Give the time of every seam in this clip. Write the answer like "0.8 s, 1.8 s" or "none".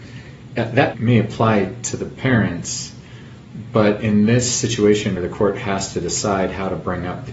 0.9 s, 5.2 s